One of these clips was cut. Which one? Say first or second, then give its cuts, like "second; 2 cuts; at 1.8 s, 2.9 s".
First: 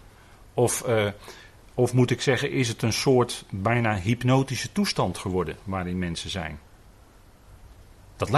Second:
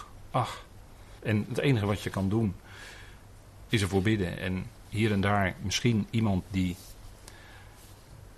second; 2 cuts; at 1.2 s, 4.8 s